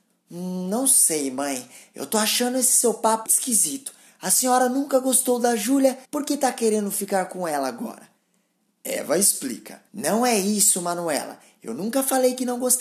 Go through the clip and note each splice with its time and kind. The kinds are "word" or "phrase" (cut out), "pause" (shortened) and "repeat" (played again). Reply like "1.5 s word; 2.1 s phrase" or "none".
3.3 s word; 6.0 s pause; 9.9 s pause